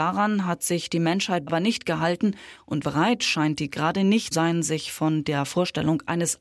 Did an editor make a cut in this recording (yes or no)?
yes